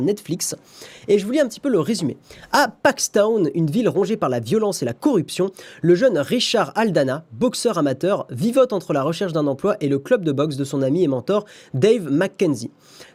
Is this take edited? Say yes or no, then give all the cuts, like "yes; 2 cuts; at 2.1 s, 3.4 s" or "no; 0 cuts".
no; 0 cuts